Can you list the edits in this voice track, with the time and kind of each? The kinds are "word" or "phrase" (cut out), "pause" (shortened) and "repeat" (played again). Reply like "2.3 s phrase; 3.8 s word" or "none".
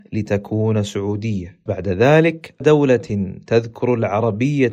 1.7 s word; 2.6 s word